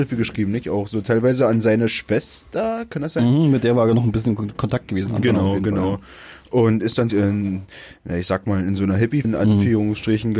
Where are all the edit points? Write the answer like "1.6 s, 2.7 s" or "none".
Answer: 7.1 s, 9.2 s